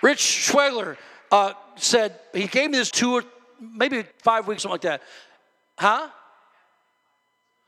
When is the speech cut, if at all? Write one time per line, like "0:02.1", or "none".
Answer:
0:02.9
0:04.1
0:04.6